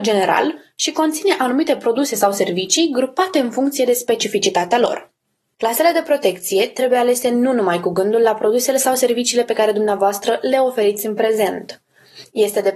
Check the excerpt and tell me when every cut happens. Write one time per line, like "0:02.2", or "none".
none